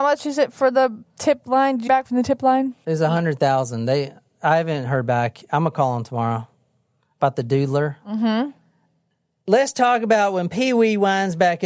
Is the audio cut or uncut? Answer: cut